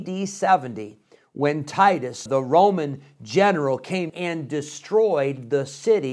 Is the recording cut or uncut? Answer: cut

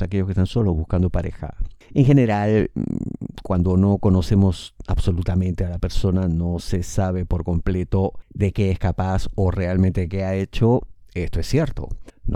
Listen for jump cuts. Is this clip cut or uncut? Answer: uncut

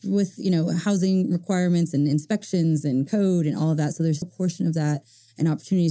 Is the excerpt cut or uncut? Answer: cut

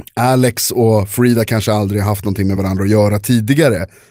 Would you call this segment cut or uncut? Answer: uncut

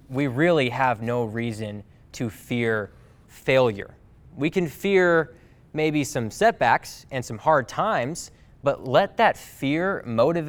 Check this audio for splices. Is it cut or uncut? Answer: uncut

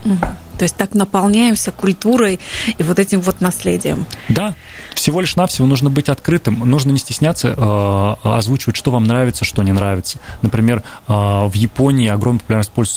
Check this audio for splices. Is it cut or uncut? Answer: uncut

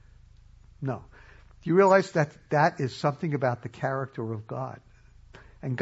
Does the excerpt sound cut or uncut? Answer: uncut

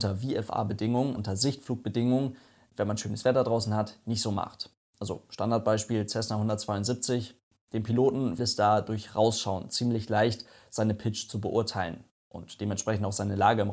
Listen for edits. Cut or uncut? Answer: cut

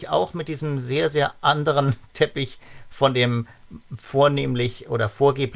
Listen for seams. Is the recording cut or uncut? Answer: uncut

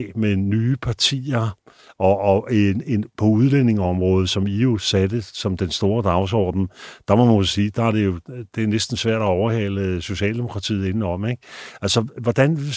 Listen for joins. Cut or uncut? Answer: uncut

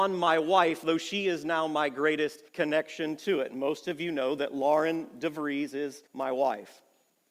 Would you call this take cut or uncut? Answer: cut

